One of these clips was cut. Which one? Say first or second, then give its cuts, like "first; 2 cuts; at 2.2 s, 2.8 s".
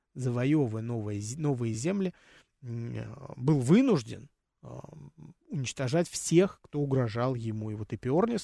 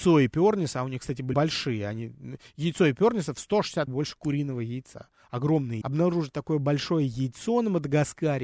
second; 3 cuts; at 1.3 s, 3.9 s, 5.8 s